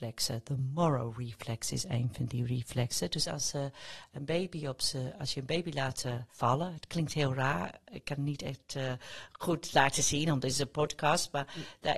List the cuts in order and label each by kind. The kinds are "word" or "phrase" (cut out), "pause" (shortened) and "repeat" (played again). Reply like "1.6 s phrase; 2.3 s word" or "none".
none